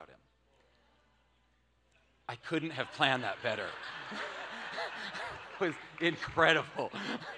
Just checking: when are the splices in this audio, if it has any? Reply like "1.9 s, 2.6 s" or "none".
5.6 s